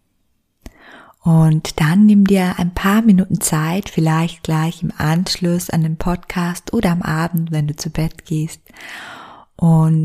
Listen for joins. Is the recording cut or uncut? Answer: uncut